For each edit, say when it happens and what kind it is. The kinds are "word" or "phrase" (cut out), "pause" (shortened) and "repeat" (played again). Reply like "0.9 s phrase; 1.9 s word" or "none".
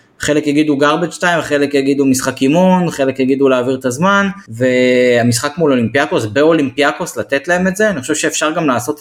none